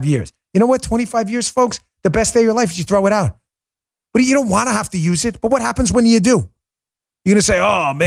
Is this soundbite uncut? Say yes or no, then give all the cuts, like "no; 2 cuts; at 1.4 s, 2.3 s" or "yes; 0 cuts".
yes; 0 cuts